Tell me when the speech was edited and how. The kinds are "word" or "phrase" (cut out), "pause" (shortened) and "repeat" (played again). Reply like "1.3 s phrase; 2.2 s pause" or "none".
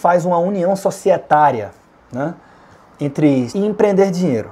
3.5 s word